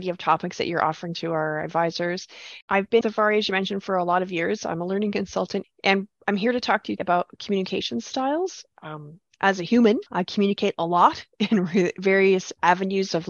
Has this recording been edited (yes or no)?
yes